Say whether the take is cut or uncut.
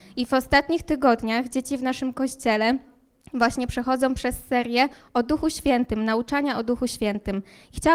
uncut